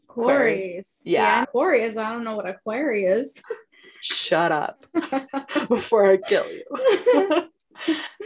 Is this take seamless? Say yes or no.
no